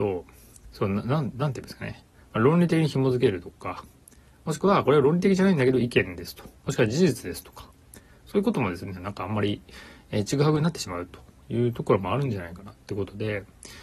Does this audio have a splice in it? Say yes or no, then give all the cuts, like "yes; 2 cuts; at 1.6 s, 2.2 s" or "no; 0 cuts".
no; 0 cuts